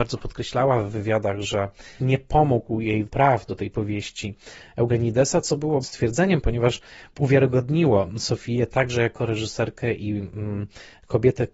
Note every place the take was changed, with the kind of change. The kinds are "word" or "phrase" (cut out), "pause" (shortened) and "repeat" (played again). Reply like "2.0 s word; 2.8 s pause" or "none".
2.0 s phrase; 3.1 s word; 5.8 s phrase